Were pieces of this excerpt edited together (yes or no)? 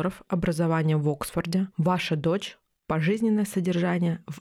no